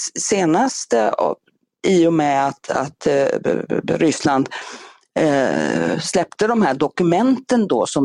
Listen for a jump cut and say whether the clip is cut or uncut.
uncut